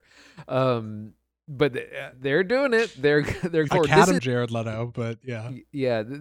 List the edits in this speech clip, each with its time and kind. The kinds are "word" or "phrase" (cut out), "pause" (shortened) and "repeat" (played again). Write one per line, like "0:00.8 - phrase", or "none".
0:02.1 - word
0:03.7 - word
0:04.2 - phrase